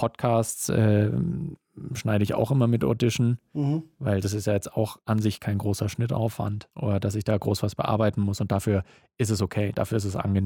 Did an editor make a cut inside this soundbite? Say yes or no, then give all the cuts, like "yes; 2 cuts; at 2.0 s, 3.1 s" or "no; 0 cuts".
yes; 1 cut; at 6.7 s